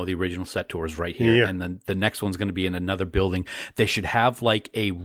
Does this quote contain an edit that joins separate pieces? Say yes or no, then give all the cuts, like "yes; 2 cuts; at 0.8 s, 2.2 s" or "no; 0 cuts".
no; 0 cuts